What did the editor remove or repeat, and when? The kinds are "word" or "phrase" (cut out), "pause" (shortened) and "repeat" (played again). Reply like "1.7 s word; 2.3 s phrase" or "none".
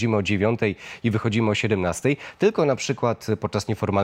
none